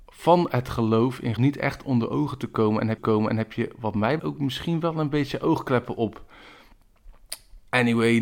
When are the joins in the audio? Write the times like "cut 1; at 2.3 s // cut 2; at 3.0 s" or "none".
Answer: cut 1; at 1.4 s // cut 2; at 3.0 s // cut 3; at 4.2 s